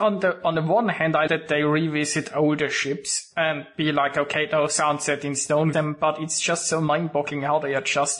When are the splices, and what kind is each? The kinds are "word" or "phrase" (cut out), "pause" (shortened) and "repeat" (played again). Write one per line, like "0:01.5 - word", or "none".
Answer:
0:01.3 - word
0:05.7 - phrase